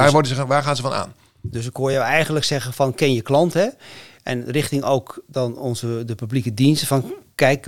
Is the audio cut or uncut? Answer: uncut